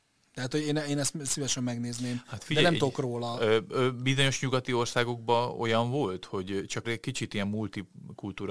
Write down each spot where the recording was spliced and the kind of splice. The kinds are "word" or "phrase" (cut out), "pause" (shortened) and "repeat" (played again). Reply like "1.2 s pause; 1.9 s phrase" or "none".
6.8 s phrase

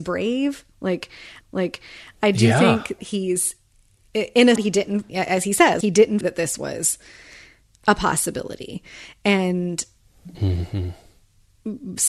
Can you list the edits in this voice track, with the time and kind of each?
1.4 s repeat; 3.0 s word; 4.6 s word; 5.1 s word; 5.8 s word; 6.2 s word

